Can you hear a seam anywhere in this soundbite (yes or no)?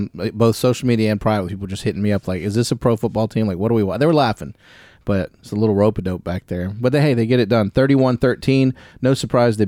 no